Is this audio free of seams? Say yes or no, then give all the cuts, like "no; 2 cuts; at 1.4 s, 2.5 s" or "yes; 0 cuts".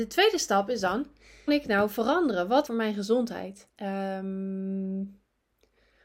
no; 3 cuts; at 1.5 s, 2.7 s, 3.7 s